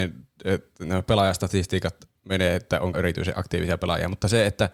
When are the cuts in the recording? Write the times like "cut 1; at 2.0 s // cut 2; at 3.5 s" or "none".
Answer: cut 1; at 2.9 s